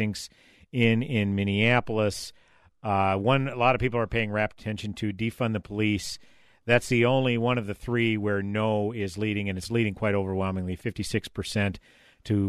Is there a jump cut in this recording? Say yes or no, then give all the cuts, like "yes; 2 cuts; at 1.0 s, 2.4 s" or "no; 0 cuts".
no; 0 cuts